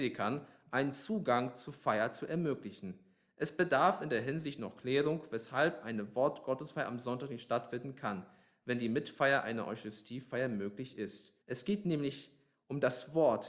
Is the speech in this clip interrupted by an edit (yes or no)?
yes